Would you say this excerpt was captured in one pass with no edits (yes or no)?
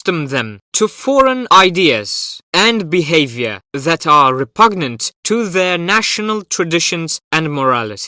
yes